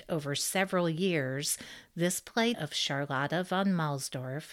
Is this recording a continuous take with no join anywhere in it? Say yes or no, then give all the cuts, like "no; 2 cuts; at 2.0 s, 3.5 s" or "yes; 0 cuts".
no; 1 cut; at 2.5 s